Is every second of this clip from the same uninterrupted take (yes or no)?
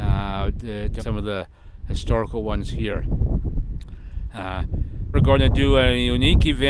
no